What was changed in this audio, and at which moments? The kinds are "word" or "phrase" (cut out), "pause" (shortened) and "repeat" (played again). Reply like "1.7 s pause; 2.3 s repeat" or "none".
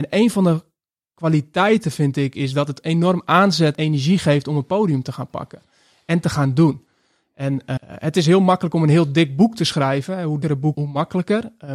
3.7 s word; 7.8 s word; 10.4 s word; 10.7 s word